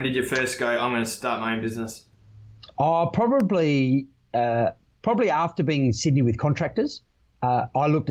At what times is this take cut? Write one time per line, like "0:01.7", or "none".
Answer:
none